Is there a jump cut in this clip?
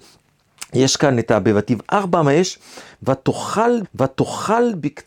yes; 1 cut; at 3.8 s

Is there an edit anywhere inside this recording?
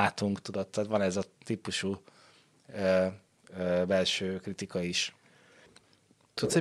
no; 0 cuts

